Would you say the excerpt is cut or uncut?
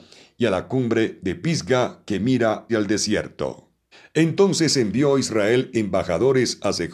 cut